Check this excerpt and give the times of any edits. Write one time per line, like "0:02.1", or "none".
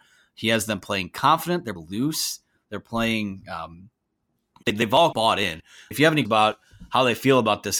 0:01.8
0:04.6
0:05.1
0:05.9
0:06.2